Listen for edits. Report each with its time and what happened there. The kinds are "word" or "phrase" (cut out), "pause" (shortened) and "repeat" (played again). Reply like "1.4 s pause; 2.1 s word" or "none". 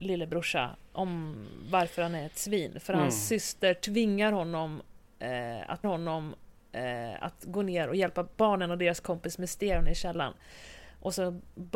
5.8 s repeat